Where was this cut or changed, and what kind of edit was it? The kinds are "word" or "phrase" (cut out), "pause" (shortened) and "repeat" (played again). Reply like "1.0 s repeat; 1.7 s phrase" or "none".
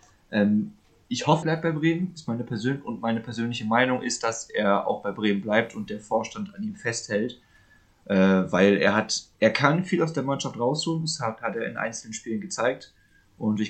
1.4 s word